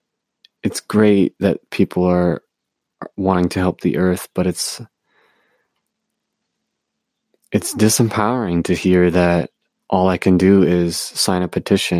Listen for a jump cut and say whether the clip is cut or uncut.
uncut